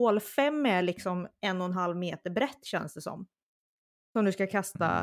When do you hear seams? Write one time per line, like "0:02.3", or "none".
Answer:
none